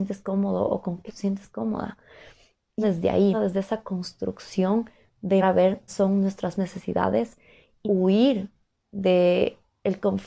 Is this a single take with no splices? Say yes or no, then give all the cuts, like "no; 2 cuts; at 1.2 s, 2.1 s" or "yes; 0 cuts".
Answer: no; 7 cuts; at 1.1 s, 2.8 s, 3.3 s, 5.4 s, 5.9 s, 6.5 s, 7.8 s